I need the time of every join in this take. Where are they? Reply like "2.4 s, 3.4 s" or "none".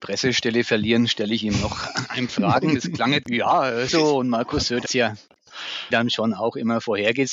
2.3 s, 3.2 s, 3.9 s, 4.9 s, 5.9 s

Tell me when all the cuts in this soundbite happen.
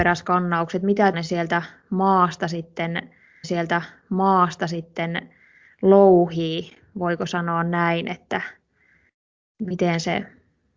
1.1 s, 3.4 s

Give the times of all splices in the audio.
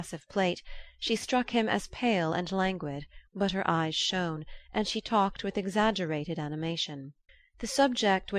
3.3 s, 7.3 s

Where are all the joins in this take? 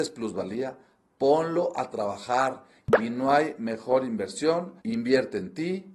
4.8 s

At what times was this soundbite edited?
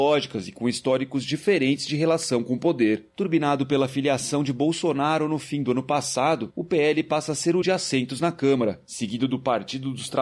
7.6 s

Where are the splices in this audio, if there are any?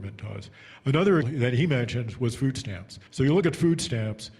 1.2 s, 3.1 s

